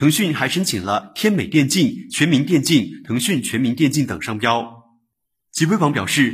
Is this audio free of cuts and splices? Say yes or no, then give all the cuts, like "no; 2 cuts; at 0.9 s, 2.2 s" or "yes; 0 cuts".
yes; 0 cuts